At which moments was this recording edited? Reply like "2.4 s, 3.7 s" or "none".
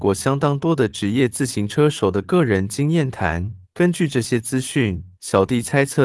3.6 s, 5.1 s